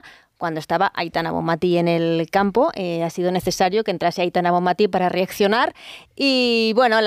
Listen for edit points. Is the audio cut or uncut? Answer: uncut